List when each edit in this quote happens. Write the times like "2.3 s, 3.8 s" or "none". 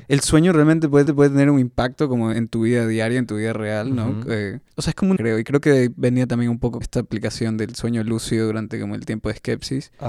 1.1 s, 2.3 s, 5.2 s, 6.8 s